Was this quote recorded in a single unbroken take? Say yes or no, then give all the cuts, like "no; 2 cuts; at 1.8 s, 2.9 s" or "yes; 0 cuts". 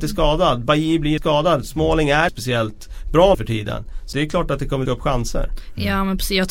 no; 5 cuts; at 1.2 s, 2.3 s, 3.3 s, 4.1 s, 4.9 s